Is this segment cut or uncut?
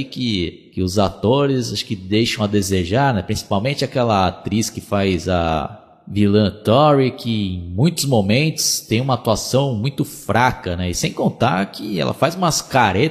uncut